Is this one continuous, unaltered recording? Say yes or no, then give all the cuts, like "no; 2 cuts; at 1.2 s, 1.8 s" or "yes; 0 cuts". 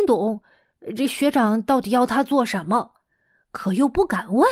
yes; 0 cuts